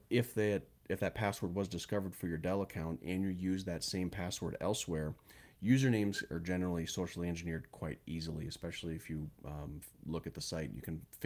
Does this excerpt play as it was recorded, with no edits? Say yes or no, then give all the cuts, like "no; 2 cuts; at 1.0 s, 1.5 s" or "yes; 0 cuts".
yes; 0 cuts